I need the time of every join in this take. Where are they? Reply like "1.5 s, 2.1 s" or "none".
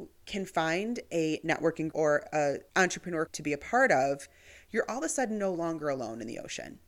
1.9 s, 3.3 s